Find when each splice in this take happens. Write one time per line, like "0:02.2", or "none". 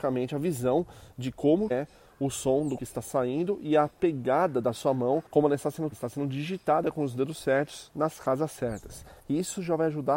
0:01.7
0:02.8
0:05.3
0:05.9
0:09.2